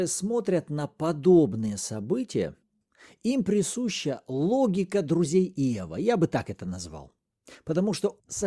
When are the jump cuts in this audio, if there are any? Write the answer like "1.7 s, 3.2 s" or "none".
none